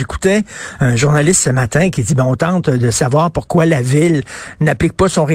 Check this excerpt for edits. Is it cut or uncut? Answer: uncut